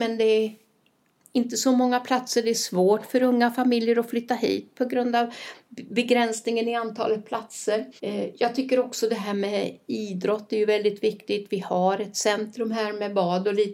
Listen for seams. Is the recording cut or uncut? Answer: cut